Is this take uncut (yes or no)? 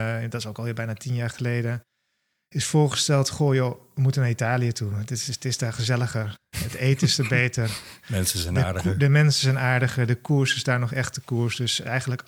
yes